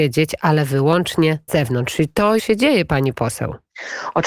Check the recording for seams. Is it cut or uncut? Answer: cut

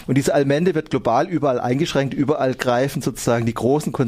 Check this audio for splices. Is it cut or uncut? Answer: uncut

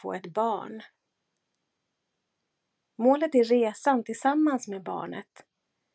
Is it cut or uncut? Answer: uncut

